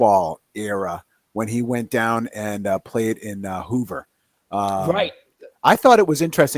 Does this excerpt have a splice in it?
no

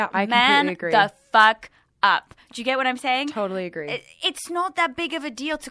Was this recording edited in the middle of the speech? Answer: no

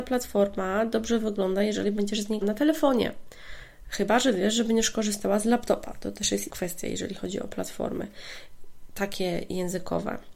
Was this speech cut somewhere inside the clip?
yes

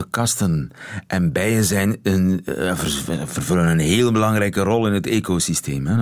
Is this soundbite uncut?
yes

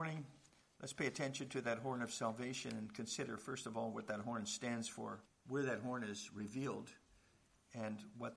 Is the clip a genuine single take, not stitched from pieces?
no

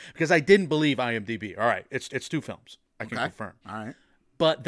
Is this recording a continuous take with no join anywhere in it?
no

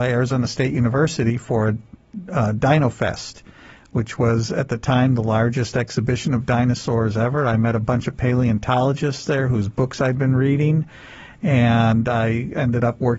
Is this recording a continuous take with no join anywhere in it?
yes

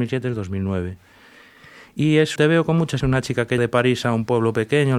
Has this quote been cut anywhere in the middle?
yes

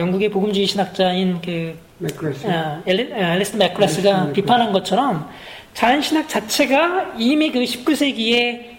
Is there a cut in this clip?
no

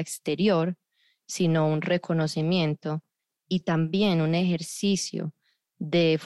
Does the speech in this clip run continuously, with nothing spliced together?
yes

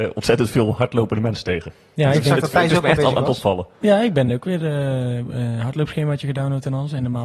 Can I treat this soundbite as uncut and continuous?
yes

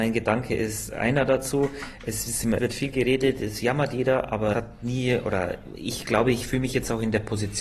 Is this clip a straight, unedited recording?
no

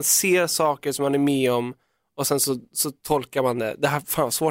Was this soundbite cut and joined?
no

